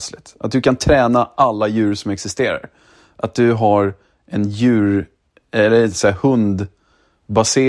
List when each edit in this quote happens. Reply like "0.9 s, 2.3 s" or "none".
none